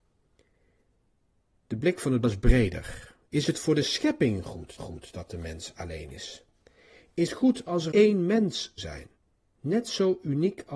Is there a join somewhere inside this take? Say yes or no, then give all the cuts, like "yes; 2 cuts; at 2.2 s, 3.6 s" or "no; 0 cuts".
yes; 6 cuts; at 2.2 s, 4.8 s, 7.3 s, 7.9 s, 8.8 s, 9.2 s